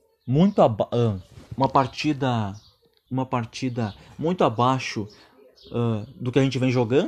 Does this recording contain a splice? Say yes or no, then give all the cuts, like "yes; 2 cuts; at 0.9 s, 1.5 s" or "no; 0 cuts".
yes; 2 cuts; at 1.5 s, 3.1 s